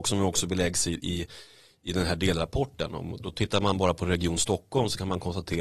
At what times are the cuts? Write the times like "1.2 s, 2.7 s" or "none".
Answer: none